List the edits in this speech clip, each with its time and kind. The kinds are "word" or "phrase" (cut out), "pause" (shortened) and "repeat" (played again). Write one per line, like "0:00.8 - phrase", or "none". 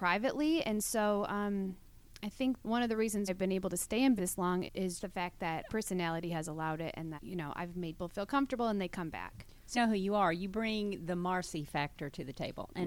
0:02.6 - word
0:03.3 - word
0:04.2 - word
0:04.7 - word
0:05.0 - word
0:05.7 - word
0:07.2 - word
0:08.0 - word
0:09.7 - word